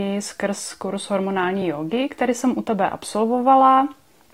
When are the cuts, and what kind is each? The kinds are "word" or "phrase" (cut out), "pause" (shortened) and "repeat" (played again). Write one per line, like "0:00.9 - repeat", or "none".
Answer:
none